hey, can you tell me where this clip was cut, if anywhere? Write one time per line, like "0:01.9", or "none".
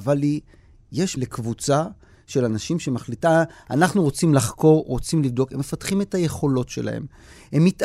0:01.2

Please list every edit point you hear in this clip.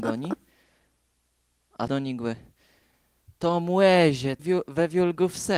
0:01.9
0:04.4

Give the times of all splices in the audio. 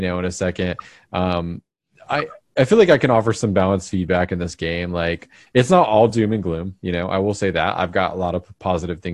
none

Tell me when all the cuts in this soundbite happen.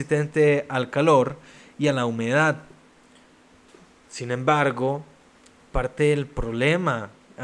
none

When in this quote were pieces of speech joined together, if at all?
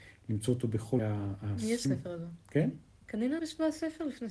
0:01.0
0:01.9
0:03.4

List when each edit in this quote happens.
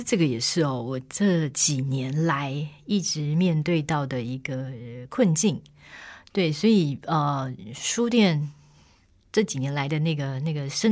none

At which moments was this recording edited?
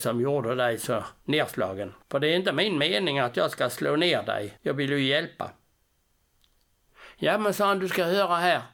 0:02.0
0:04.6

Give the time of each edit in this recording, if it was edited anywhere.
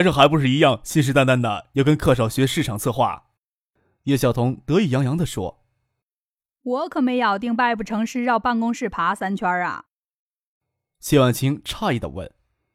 0:03.4

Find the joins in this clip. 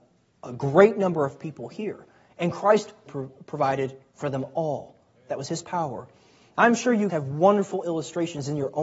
0:03.1
0:07.1

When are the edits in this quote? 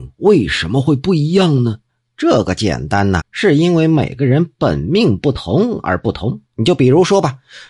0:01.9
0:03.2
0:06.5

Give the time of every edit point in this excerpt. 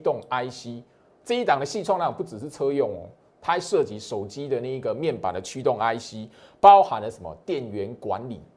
none

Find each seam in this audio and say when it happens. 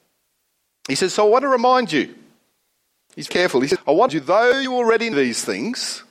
0:03.3
0:04.1
0:05.1

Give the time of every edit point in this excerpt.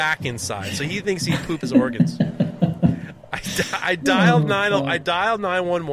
0:01.6

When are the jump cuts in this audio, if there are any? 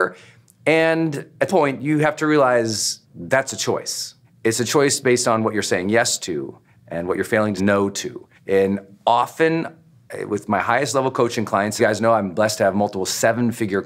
0:01.5
0:03.0
0:04.2
0:07.6
0:08.4
0:11.8

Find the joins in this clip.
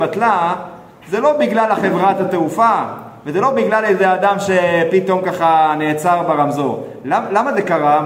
none

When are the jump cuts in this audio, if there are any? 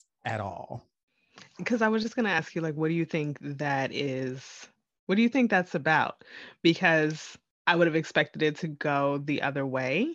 none

